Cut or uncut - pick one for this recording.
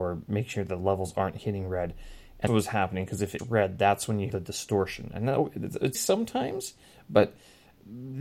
cut